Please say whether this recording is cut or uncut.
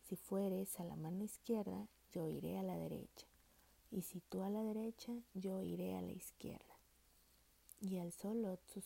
uncut